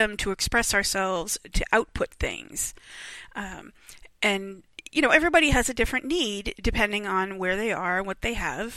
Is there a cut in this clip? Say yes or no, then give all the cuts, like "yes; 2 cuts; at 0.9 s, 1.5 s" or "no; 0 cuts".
no; 0 cuts